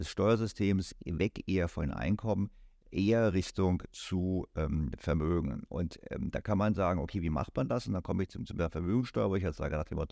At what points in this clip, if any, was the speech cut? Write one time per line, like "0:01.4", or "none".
none